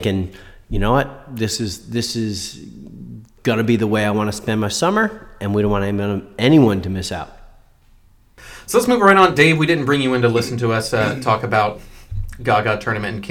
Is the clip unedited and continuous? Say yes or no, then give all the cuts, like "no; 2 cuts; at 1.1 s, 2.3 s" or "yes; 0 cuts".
yes; 0 cuts